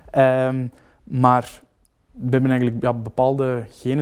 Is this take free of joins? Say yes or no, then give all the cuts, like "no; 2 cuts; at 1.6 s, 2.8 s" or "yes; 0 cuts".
yes; 0 cuts